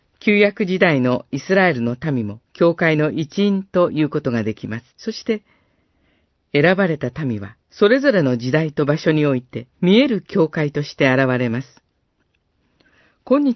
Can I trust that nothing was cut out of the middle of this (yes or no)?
no